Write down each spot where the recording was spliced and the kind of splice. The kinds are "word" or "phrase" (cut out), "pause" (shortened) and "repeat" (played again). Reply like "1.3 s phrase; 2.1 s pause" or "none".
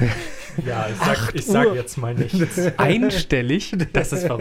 1.7 s word